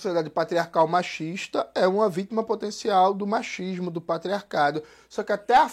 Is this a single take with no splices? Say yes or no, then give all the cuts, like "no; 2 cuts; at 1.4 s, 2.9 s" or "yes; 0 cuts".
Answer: yes; 0 cuts